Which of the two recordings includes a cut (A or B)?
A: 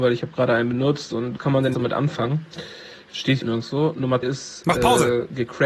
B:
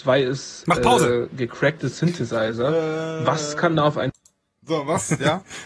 A